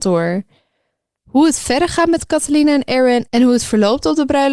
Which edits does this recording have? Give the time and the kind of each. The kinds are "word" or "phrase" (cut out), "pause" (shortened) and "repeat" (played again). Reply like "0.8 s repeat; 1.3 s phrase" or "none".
none